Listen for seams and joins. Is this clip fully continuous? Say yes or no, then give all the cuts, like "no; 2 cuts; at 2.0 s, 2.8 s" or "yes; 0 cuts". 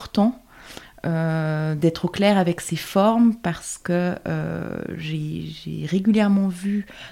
yes; 0 cuts